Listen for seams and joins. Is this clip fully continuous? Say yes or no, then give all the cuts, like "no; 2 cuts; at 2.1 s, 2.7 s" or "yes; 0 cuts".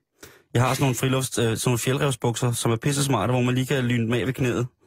yes; 0 cuts